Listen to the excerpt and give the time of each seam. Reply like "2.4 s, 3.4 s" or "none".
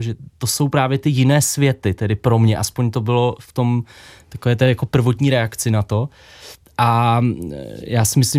none